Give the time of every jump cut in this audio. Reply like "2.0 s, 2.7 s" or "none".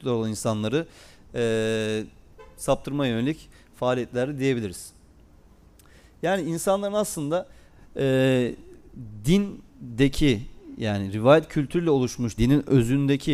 12.4 s